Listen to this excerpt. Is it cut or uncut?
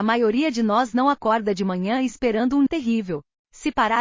cut